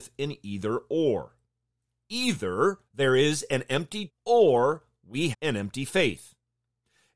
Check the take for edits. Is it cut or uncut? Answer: cut